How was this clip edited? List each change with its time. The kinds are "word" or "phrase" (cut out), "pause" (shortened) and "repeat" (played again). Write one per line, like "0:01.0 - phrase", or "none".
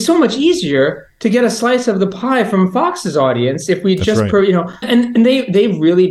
0:04.8 - word